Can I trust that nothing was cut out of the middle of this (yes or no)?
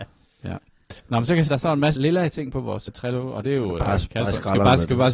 no